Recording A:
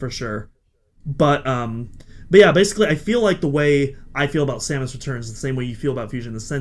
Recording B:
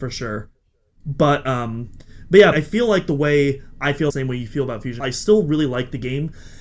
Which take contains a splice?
B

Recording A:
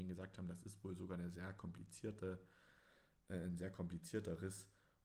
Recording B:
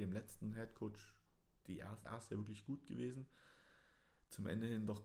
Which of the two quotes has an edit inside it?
B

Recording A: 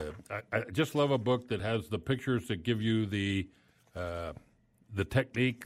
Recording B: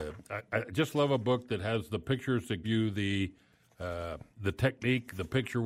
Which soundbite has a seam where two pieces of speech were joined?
B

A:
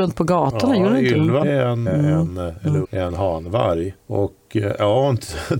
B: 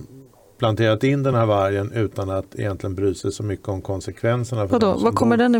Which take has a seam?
A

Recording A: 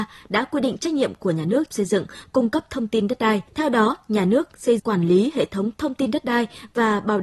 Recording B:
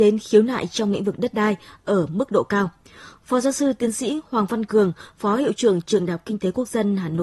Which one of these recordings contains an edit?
A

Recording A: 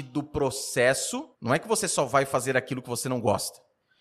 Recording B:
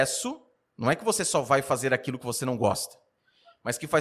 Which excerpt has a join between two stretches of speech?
A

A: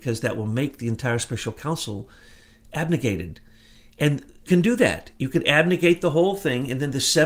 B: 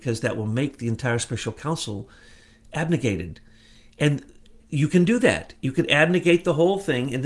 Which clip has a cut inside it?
A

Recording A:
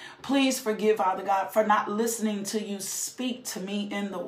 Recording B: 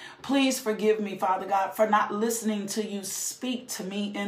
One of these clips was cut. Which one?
A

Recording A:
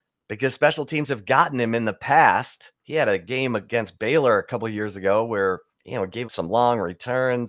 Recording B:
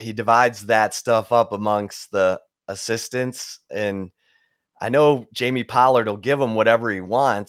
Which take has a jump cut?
A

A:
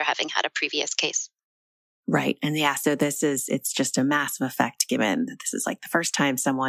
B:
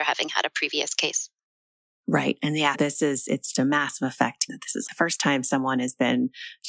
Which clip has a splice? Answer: B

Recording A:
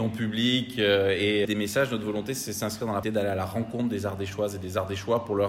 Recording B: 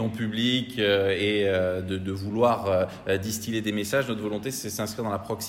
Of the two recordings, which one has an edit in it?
A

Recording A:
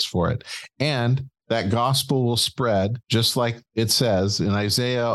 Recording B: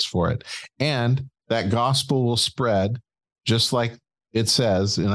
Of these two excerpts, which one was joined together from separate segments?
A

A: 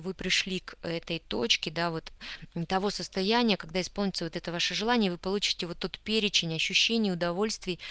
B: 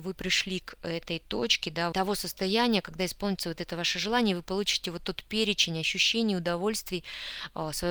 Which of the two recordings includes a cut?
B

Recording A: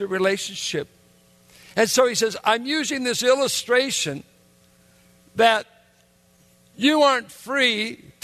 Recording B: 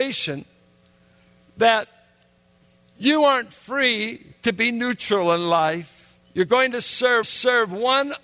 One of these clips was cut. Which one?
B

